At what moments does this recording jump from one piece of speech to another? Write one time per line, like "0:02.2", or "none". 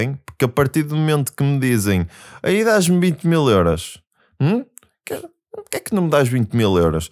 none